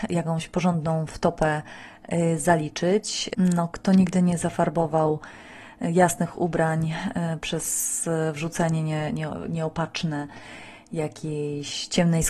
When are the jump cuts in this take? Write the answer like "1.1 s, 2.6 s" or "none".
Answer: none